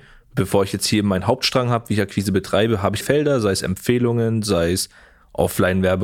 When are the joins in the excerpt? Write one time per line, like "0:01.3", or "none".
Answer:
0:03.0